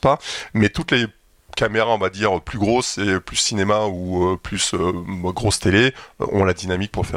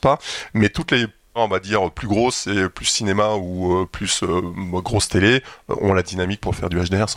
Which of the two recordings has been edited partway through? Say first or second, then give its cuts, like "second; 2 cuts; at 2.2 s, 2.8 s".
second; 1 cut; at 1.4 s